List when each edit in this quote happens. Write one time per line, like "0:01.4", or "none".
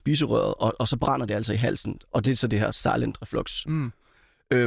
none

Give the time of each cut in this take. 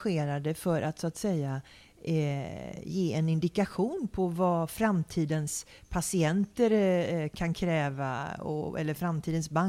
none

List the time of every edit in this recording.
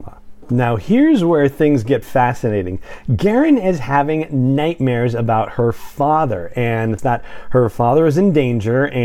0:02.0
0:07.0

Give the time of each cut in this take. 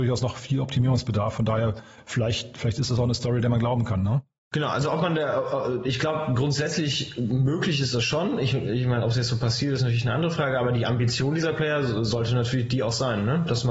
none

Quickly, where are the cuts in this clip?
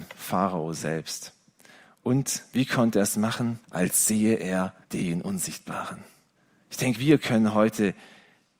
0:03.6
0:04.8
0:06.4
0:06.9

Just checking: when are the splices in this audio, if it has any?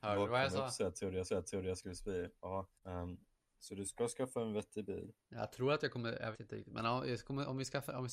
0:01.3
0:02.8
0:06.3

